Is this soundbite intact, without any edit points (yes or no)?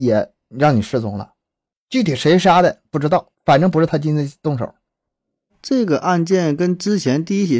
yes